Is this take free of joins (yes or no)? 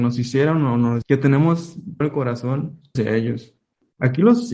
no